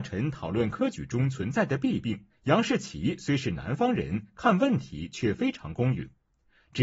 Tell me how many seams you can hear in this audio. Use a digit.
1